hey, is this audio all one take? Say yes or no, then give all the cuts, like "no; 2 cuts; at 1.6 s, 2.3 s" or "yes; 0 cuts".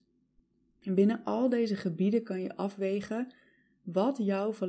yes; 0 cuts